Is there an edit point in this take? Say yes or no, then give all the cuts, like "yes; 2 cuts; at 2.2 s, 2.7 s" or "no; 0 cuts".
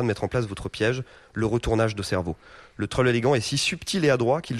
no; 0 cuts